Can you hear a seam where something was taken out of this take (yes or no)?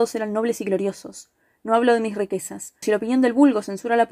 yes